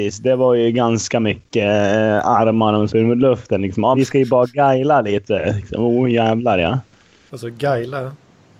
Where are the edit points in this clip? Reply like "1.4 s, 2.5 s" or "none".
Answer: 2.9 s, 3.9 s